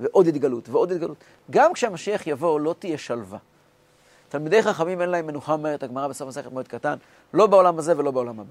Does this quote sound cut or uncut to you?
uncut